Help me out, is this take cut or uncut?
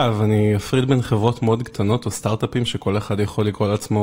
uncut